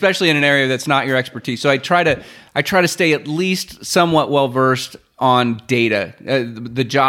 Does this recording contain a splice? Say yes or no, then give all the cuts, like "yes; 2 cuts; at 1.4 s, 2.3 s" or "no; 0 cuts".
no; 0 cuts